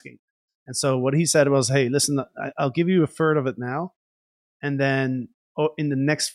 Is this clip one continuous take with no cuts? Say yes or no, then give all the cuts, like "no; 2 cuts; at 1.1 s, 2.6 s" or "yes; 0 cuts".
yes; 0 cuts